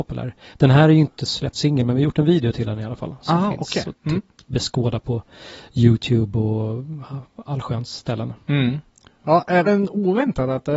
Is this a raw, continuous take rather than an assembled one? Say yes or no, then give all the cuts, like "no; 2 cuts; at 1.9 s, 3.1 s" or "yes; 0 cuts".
no; 2 cuts; at 1.5 s, 9.6 s